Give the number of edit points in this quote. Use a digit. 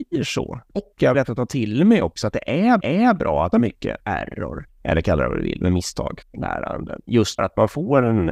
6